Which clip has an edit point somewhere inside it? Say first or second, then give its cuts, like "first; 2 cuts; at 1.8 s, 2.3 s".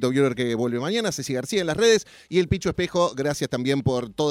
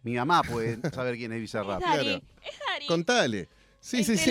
second; 1 cut; at 0.9 s